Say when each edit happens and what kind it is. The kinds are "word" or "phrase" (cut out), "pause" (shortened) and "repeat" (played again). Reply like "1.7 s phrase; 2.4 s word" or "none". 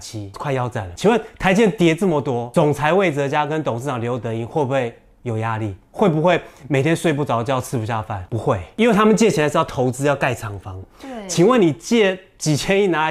5.8 s pause